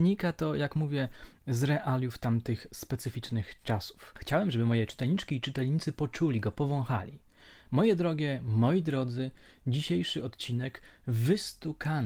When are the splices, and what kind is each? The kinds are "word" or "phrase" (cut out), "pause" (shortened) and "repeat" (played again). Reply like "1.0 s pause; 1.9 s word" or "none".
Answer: none